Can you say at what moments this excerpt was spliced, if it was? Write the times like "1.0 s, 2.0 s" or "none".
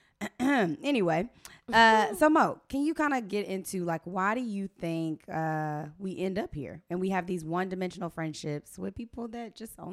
none